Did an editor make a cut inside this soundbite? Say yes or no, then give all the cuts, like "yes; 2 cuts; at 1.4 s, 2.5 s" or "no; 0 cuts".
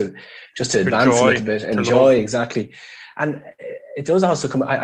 no; 0 cuts